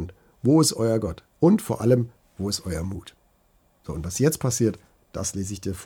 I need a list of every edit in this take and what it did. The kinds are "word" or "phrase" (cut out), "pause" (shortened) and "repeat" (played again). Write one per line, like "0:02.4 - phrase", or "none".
none